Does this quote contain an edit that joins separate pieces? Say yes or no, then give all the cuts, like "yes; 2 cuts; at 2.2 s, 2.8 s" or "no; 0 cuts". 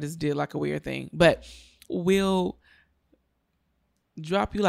yes; 1 cut; at 1.9 s